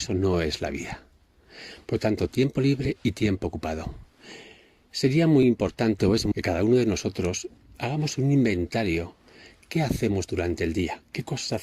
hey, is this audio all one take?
no; 1 cut; at 6.3 s

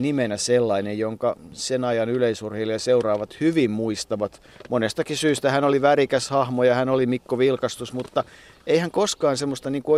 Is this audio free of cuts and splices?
yes; 0 cuts

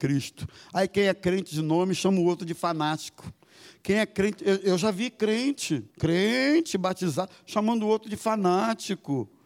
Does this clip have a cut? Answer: yes; 1 cut; at 5.9 s

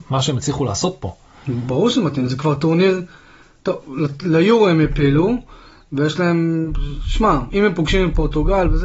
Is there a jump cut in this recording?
no; 0 cuts

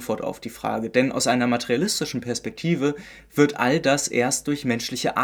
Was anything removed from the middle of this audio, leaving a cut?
no; 0 cuts

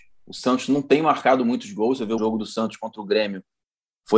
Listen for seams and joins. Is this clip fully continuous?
no; 1 cut; at 2.2 s

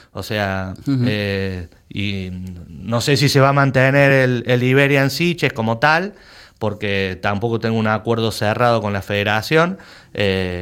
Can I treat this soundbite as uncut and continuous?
yes; 0 cuts

